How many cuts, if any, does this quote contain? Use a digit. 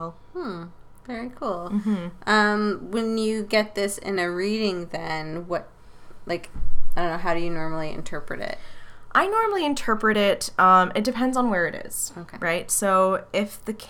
0